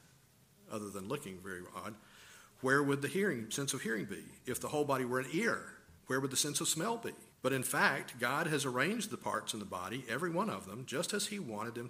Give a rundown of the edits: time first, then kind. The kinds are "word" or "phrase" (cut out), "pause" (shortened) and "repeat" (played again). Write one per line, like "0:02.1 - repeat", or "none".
0:06.0 - pause
0:07.3 - pause